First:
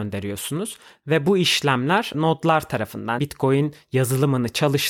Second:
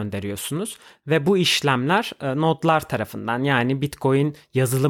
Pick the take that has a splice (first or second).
first